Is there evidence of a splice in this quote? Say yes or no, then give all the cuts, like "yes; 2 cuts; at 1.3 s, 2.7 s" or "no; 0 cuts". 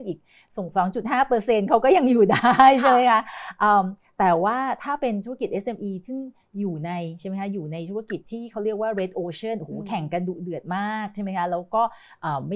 no; 0 cuts